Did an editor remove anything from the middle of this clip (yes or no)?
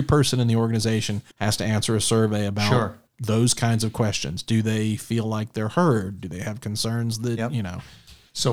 yes